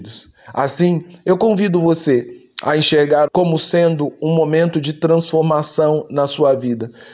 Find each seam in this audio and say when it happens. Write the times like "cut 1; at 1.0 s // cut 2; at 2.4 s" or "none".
cut 1; at 3.3 s